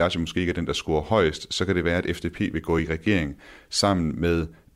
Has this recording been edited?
no; 0 cuts

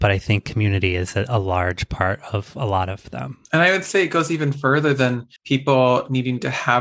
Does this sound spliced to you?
yes; 2 cuts; at 3.4 s, 5.4 s

